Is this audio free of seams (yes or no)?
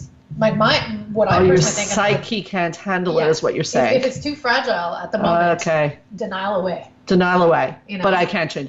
yes